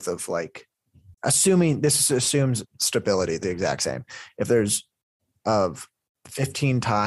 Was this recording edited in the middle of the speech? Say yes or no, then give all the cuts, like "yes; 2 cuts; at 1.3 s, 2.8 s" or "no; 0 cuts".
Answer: yes; 4 cuts; at 1.1 s, 2.7 s, 3.4 s, 5.4 s